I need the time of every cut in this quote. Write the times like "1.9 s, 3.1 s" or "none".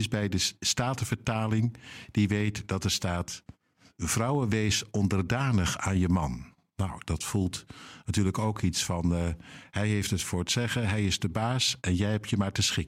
none